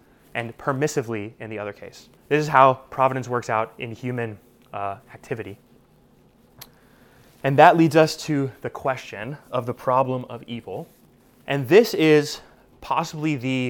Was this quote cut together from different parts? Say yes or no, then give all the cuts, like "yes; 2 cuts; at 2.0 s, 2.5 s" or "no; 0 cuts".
yes; 2 cuts; at 2.2 s, 11.2 s